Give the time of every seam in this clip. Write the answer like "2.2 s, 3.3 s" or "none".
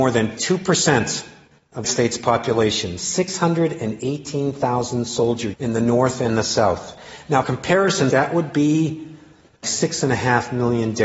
1.8 s, 5.5 s, 7.4 s, 8.1 s, 9.6 s